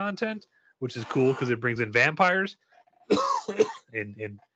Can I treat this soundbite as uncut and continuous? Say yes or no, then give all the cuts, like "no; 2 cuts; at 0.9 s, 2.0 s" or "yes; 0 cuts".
yes; 0 cuts